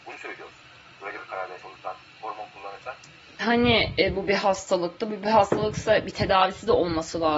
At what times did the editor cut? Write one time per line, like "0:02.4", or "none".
0:01.6
0:03.4